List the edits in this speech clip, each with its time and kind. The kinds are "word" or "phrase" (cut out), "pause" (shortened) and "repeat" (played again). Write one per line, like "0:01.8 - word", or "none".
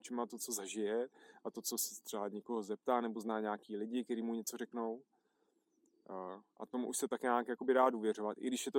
none